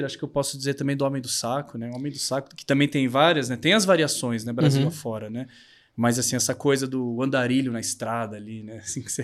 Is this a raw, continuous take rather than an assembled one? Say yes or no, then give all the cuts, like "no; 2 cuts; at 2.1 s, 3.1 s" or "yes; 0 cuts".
yes; 0 cuts